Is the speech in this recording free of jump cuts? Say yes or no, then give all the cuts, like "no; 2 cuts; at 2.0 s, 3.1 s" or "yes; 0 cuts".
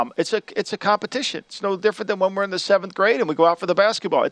yes; 0 cuts